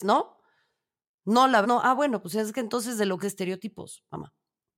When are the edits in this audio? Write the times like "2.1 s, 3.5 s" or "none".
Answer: 1.6 s, 3.2 s